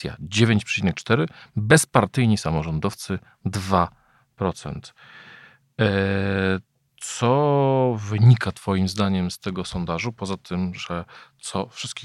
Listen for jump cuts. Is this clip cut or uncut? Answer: uncut